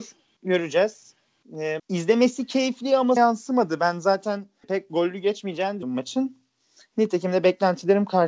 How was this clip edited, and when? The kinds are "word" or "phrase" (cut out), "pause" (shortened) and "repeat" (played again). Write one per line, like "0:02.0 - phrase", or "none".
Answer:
0:01.8 - word
0:03.2 - word
0:04.6 - word
0:05.8 - word